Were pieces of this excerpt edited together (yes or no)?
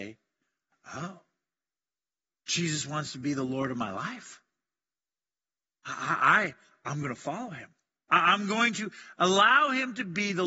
no